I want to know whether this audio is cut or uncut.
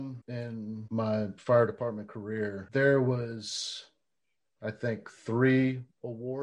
uncut